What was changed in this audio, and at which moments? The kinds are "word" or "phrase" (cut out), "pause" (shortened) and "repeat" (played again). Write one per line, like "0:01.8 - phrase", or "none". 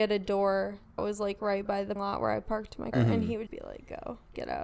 0:01.0 - word
0:02.0 - word
0:02.9 - word
0:03.5 - word